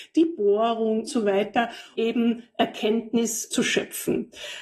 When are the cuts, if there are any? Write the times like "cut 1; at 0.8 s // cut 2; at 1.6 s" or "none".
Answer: cut 1; at 1.1 s // cut 2; at 1.9 s